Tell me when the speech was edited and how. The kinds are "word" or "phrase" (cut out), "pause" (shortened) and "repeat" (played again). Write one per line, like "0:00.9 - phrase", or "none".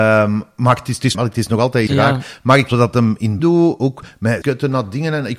0:01.1 - word
0:01.9 - word
0:02.7 - word
0:03.4 - word
0:04.4 - word